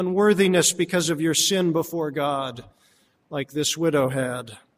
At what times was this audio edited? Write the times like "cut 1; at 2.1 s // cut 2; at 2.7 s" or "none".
none